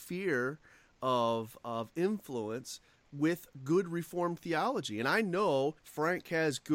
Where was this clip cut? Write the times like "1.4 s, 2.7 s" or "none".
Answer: 5.8 s